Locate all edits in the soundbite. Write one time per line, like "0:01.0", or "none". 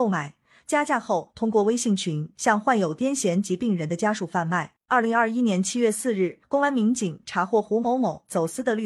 0:04.8
0:06.4

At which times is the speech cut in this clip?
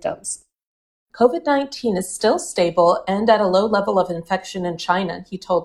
none

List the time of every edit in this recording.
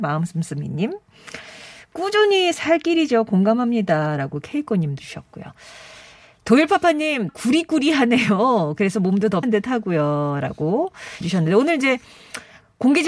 0:02.5
0:05.0
0:07.3
0:09.4
0:11.2

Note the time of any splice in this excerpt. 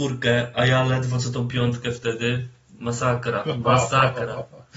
none

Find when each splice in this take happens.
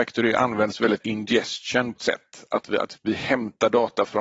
0:01.0
0:02.0
0:02.9

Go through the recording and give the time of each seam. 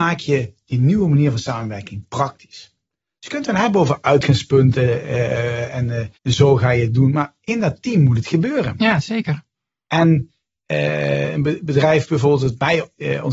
0:06.2

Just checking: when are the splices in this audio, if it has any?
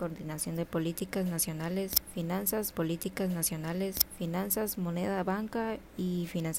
0:02.7

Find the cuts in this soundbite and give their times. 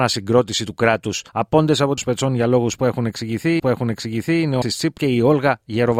0:01.3
0:02.0
0:03.6
0:04.6
0:05.0

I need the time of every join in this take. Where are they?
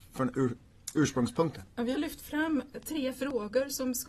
0:01.9
0:02.7

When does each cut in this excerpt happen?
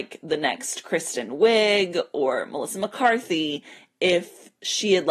none

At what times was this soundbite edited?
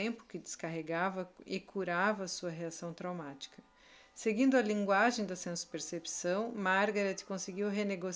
none

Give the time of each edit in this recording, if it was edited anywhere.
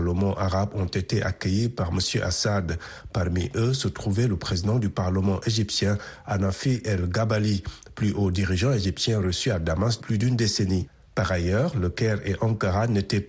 0:10.0

